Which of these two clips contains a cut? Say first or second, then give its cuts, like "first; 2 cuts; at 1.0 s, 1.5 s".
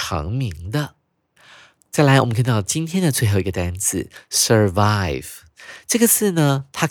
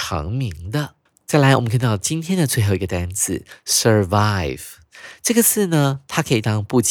second; 1 cut; at 1.1 s